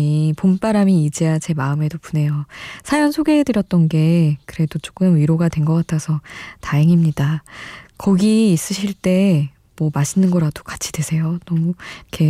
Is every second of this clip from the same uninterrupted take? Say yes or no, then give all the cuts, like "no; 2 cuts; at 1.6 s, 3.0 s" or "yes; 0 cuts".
yes; 0 cuts